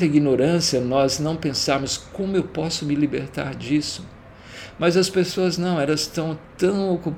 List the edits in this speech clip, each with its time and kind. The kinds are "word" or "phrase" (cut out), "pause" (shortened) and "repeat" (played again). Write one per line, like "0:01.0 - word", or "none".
none